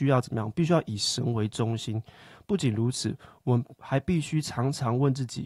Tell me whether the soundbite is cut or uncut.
uncut